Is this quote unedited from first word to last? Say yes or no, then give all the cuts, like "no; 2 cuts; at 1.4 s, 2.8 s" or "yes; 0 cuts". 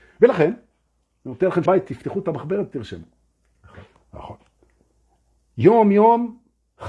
no; 2 cuts; at 1.7 s, 3.9 s